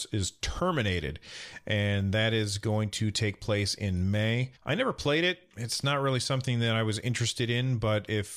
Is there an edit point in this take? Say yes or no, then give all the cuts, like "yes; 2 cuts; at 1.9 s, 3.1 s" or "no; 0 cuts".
yes; 1 cut; at 4.6 s